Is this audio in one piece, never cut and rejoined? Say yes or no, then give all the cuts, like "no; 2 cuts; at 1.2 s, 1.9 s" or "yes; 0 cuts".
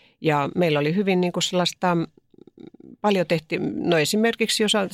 yes; 0 cuts